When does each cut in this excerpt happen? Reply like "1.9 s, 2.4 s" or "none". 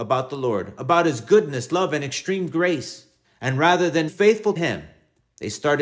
3.2 s, 4.1 s, 4.6 s